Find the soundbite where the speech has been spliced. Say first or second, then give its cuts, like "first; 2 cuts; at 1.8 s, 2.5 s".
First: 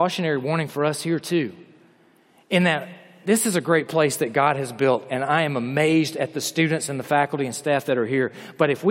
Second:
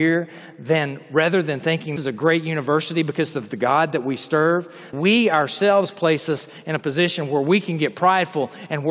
second; 2 cuts; at 2.0 s, 4.9 s